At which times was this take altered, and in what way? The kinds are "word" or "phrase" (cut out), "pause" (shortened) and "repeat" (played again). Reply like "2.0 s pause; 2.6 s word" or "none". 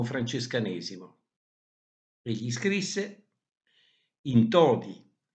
none